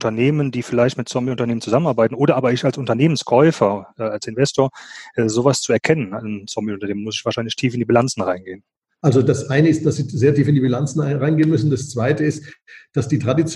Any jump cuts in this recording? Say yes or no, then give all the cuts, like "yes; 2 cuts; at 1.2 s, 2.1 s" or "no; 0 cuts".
no; 0 cuts